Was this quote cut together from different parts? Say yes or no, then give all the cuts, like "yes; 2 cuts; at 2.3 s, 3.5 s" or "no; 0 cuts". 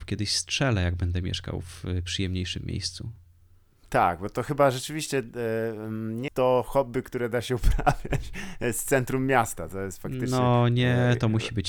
yes; 1 cut; at 6.3 s